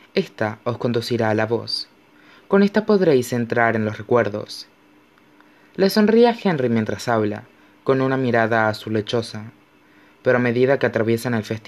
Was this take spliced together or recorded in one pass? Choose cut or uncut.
uncut